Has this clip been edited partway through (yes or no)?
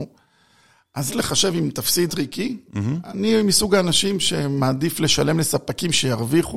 yes